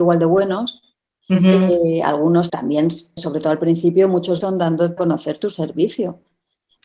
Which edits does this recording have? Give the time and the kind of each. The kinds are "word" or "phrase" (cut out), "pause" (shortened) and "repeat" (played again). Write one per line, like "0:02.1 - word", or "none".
0:02.5 - word
0:03.2 - word
0:04.4 - word
0:05.0 - word